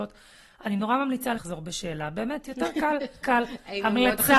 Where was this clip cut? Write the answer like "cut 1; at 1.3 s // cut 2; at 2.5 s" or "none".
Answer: cut 1; at 1.3 s // cut 2; at 3.2 s

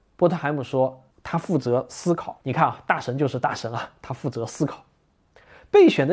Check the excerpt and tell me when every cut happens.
cut 1; at 1.1 s // cut 2; at 2.4 s

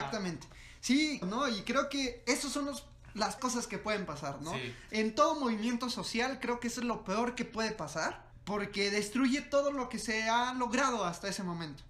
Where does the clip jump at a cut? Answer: cut 1; at 1.2 s // cut 2; at 3.4 s

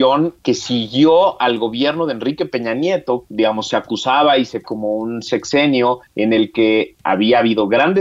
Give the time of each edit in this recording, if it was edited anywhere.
cut 1; at 3.2 s // cut 2; at 4.6 s

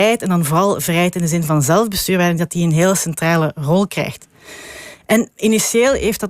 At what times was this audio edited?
cut 1; at 5.3 s

